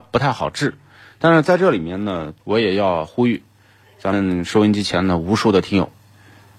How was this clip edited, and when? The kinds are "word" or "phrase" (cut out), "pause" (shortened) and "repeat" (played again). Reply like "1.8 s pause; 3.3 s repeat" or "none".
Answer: 2.4 s pause